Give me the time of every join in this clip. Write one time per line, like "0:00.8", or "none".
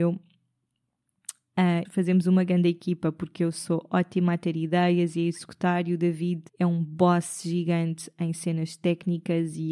0:01.9
0:06.5